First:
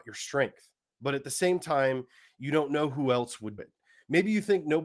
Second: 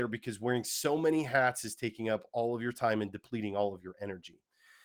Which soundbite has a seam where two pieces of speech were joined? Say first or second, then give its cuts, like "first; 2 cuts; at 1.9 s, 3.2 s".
first; 1 cut; at 3.6 s